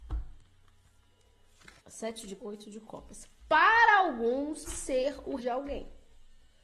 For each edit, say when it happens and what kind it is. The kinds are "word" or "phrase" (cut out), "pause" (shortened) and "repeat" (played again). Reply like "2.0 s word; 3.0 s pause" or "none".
1.8 s pause; 2.4 s word; 4.7 s word; 5.4 s word